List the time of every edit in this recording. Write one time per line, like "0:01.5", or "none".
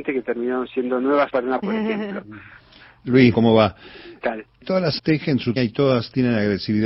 0:01.3
0:01.6
0:03.3
0:04.2
0:04.6
0:05.0
0:05.6